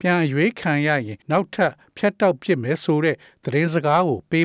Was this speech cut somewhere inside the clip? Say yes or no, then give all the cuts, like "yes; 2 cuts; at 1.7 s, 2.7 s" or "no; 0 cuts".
yes; 1 cut; at 1.2 s